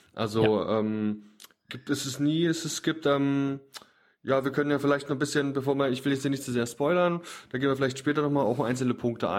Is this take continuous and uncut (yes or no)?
yes